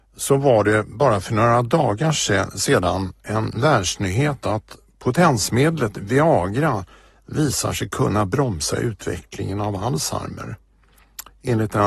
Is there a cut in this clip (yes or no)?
no